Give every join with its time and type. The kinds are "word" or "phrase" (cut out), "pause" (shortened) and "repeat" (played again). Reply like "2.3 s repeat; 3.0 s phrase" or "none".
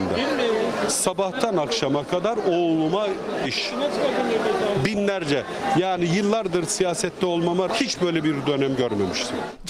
3.4 s word; 7.7 s word